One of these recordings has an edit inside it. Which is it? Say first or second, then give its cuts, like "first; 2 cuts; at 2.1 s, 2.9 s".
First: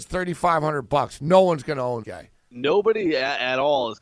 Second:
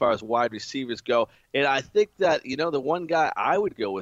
first; 2 cuts; at 2.0 s, 2.3 s